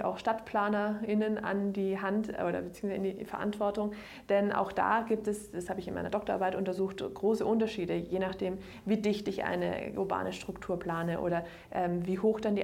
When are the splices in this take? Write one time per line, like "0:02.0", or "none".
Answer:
none